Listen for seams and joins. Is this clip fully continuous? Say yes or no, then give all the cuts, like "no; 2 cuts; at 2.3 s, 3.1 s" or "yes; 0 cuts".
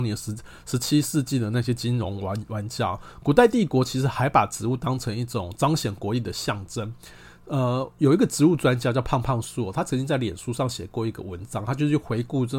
yes; 0 cuts